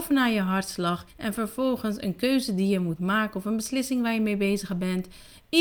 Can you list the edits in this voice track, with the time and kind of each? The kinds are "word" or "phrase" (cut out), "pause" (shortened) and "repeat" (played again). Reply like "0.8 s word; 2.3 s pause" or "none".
1.1 s pause